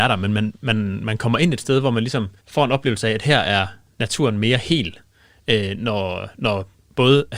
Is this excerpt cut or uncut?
cut